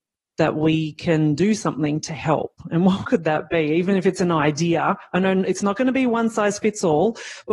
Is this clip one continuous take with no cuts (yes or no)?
yes